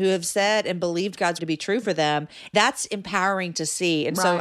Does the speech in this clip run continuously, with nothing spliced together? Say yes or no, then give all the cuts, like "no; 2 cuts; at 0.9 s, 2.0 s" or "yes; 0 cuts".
no; 2 cuts; at 1.4 s, 2.5 s